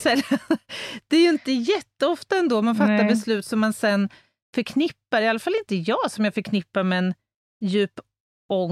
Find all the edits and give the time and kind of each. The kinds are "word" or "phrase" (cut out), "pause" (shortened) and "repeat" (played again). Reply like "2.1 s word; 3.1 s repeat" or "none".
none